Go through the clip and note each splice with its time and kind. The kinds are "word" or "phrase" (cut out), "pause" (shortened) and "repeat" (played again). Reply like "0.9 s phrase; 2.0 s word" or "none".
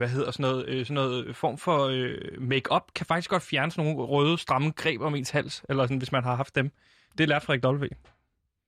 none